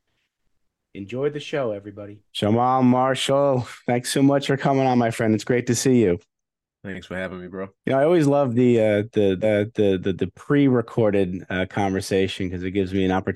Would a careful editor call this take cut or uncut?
cut